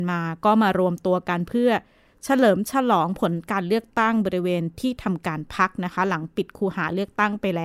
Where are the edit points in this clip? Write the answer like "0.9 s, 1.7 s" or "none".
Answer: none